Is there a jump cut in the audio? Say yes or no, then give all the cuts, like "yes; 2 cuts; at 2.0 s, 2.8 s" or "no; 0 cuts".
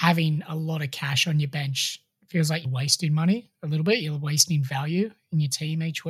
no; 0 cuts